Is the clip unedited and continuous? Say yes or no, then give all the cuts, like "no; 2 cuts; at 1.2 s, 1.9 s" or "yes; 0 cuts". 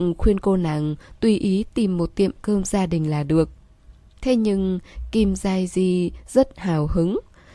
yes; 0 cuts